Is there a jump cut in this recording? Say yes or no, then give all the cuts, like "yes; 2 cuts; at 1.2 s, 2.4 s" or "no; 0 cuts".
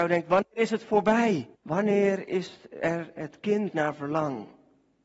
yes; 2 cuts; at 1.5 s, 3.7 s